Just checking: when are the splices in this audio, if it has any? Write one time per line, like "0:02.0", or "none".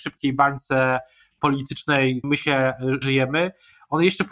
0:02.2
0:03.0